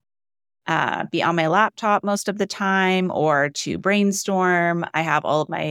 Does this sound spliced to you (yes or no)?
no